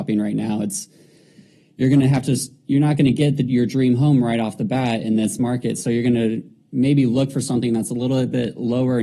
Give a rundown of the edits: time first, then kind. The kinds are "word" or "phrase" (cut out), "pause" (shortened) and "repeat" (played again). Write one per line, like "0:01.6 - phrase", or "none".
none

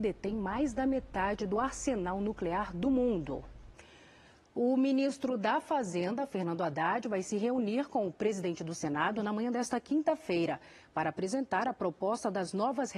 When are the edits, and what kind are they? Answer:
none

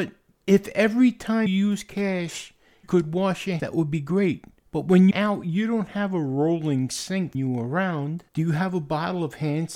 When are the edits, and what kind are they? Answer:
0:01.5 - word
0:02.8 - word
0:03.6 - word
0:05.1 - word
0:07.3 - word
0:08.3 - pause

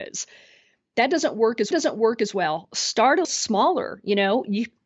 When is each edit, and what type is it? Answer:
0:01.7 - repeat
0:03.2 - word

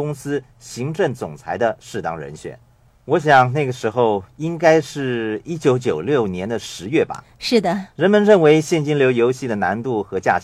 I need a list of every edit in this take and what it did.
0:07.9 - pause

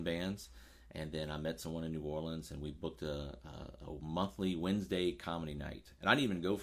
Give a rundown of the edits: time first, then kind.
none

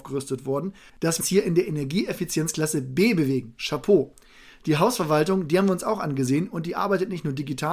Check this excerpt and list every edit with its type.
0:01.2 - word

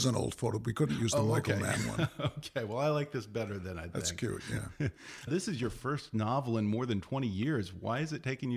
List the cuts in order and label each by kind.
0:05.3 - word

